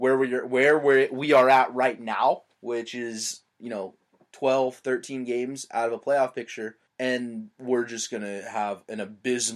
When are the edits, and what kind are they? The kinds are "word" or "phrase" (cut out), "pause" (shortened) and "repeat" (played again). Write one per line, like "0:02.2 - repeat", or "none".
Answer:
0:02.5 - pause
0:03.5 - pause
0:06.9 - pause